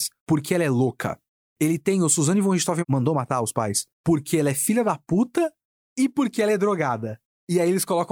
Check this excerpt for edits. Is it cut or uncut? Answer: cut